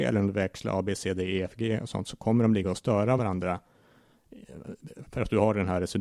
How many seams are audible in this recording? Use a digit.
0